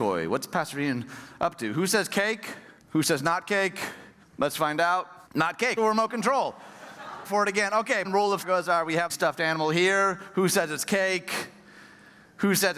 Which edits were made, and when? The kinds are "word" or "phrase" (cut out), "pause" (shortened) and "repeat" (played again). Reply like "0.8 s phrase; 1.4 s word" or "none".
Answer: 2.8 s pause; 4.2 s pause; 5.3 s pause; 5.8 s word; 7.2 s word; 8.0 s phrase; 8.4 s phrase; 9.1 s phrase